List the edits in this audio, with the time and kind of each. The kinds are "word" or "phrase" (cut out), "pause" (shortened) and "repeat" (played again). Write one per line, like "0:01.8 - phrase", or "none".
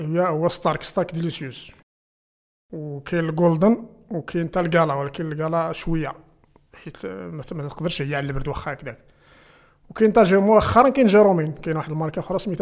none

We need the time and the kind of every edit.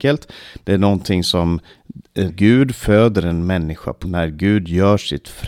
0:02.3 - word
0:04.0 - word

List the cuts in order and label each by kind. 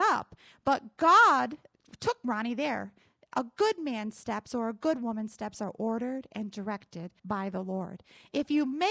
0:07.2 - pause

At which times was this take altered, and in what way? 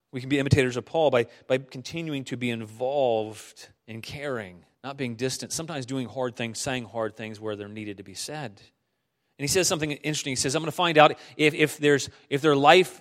0:03.8 - pause
0:04.7 - pause
0:09.1 - pause

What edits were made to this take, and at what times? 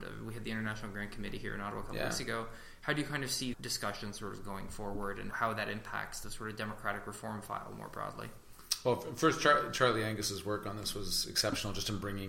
0:03.5 - word
0:05.3 - word
0:06.2 - word

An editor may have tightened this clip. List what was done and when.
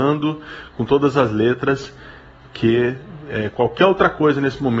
none

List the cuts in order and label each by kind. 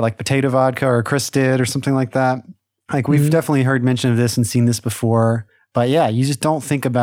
none

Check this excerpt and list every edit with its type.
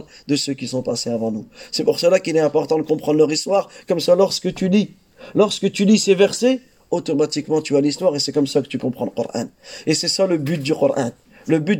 none

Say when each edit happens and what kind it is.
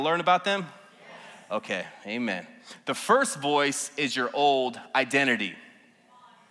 none

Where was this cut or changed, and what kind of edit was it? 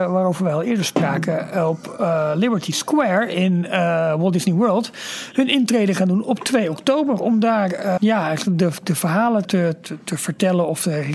0:08.0 - word
0:09.4 - word

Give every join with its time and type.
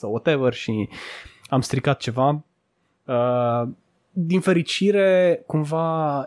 none

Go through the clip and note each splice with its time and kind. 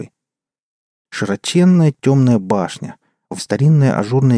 0:03.4 - word

